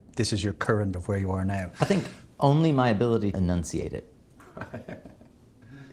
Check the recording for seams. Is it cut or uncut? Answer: cut